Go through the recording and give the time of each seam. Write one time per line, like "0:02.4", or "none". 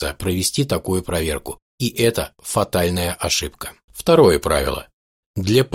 0:03.9